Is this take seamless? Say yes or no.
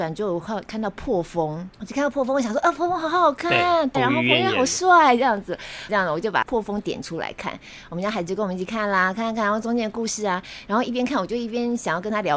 no